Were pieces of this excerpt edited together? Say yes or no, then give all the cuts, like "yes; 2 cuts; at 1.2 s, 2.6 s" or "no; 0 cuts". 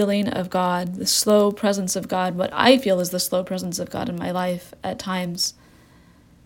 no; 0 cuts